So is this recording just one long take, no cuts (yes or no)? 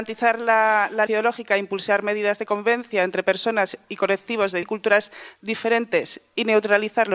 no